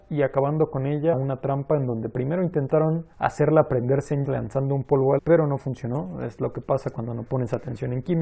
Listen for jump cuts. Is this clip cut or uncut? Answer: cut